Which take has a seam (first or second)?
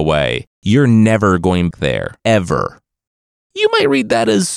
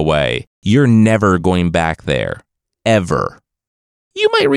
first